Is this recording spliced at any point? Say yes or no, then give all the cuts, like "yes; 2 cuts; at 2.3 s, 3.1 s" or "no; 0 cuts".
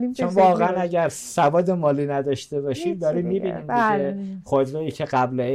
no; 0 cuts